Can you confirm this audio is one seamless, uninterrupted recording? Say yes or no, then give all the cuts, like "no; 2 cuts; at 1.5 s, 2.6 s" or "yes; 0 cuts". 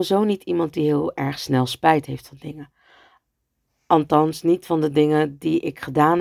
yes; 0 cuts